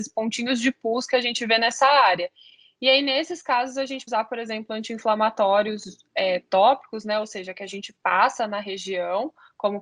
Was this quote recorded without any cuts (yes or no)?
no